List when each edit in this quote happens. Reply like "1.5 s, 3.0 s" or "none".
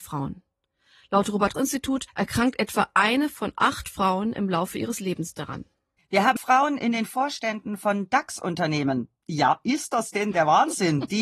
1.5 s, 2.1 s, 6.0 s, 6.4 s